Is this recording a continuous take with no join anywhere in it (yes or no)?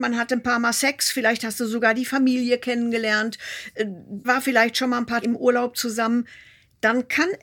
no